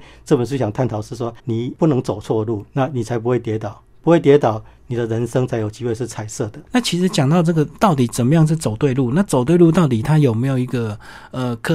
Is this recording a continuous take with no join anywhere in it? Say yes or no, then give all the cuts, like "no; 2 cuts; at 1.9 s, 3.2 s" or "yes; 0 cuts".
no; 2 cuts; at 1.4 s, 2.7 s